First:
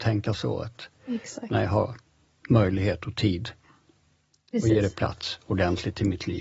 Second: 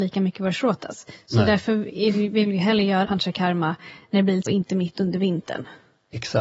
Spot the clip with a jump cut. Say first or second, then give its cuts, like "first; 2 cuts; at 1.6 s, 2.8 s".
second; 2 cuts; at 3.0 s, 4.5 s